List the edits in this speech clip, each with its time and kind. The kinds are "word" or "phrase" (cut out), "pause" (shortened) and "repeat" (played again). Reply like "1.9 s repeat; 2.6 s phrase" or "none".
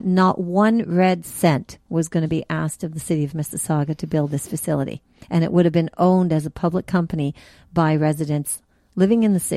none